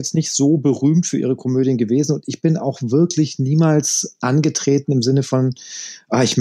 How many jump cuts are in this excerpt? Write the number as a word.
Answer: zero